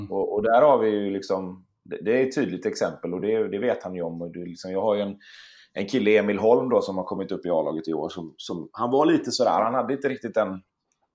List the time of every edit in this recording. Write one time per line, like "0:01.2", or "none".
none